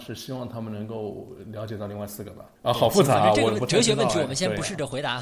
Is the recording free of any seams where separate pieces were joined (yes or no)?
no